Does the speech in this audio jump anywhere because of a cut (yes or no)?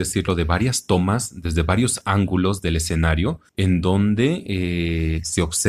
yes